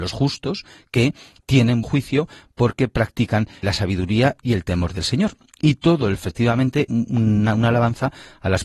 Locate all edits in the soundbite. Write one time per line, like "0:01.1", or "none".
0:01.8
0:03.6
0:06.1
0:06.9